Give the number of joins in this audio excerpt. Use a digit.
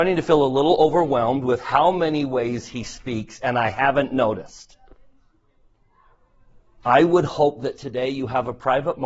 0